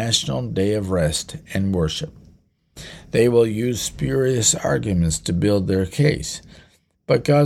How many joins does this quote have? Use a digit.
0